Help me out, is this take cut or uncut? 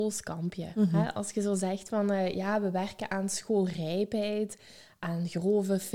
uncut